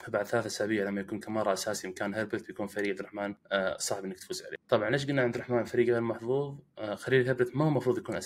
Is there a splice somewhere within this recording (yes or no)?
no